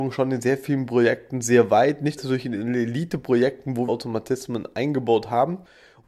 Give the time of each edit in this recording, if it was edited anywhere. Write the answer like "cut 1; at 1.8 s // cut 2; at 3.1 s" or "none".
cut 1; at 2.2 s // cut 2; at 3.9 s